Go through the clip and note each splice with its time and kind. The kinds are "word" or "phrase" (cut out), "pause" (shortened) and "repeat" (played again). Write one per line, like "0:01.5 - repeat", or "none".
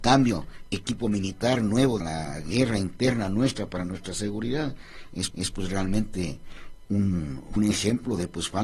0:02.0 - phrase
0:05.3 - repeat
0:07.6 - phrase